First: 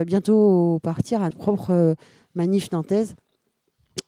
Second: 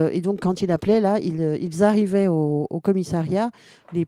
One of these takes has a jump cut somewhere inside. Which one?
first; 1 cut; at 1.3 s

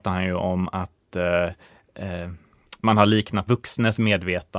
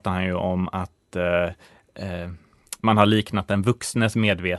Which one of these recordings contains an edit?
first; 1 cut; at 3.5 s

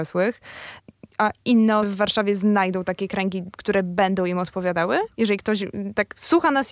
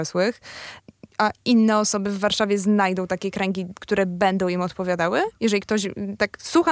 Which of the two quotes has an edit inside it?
first; 1 cut; at 1.8 s

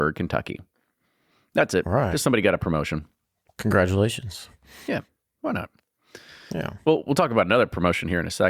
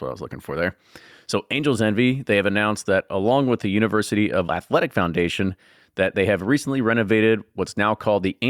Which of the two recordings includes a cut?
second; 1 cut; at 4.5 s

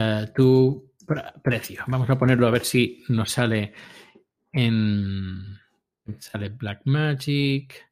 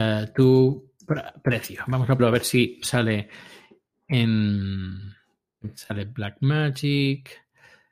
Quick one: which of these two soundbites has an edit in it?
second; 2 cuts; at 2.2 s, 2.8 s

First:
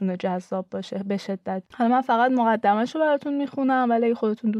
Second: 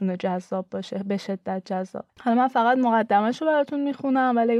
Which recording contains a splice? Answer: first; 1 cut; at 1.6 s

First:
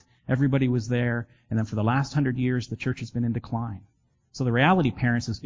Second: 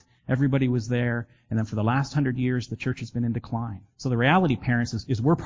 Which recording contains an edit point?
second; 1 cut; at 3.9 s

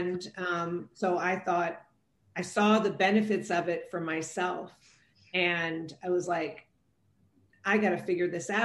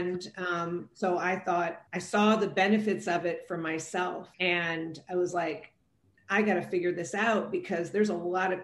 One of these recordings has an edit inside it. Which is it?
second; 3 cuts; at 1.9 s, 4.3 s, 6.0 s

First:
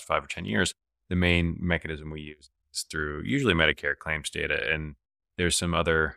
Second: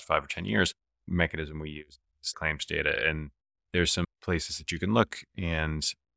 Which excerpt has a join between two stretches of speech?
second; 3 cuts; at 1.1 s, 2.3 s, 4.0 s

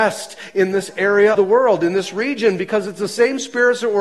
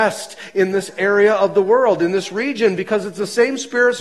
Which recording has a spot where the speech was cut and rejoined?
first; 1 cut; at 1.3 s

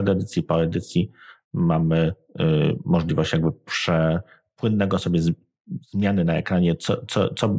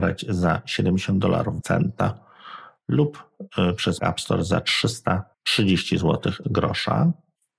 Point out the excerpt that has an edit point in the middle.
second; 4 cuts; at 1.6 s, 4.0 s, 5.3 s, 6.4 s

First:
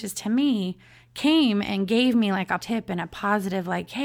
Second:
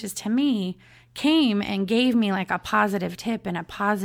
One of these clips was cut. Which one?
first; 1 cut; at 2.6 s

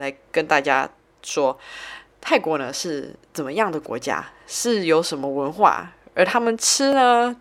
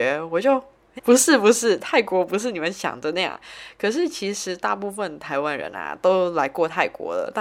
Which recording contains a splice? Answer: second; 1 cut; at 1.0 s

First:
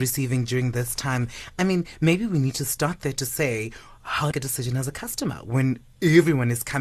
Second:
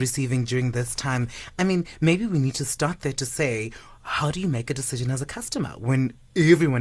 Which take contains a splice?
first; 1 cut; at 4.3 s

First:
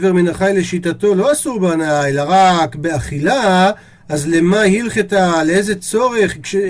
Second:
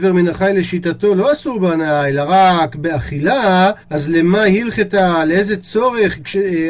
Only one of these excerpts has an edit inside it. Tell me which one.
second; 1 cut; at 3.8 s

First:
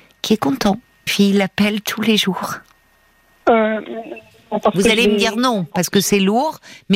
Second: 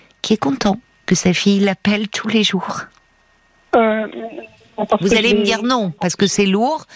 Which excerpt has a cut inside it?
first; 1 cut; at 1.1 s

